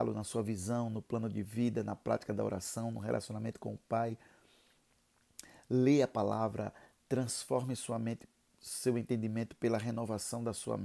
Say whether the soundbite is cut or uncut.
uncut